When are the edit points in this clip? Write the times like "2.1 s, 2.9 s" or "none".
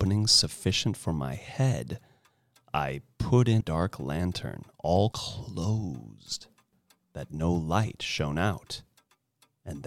3.6 s, 5.1 s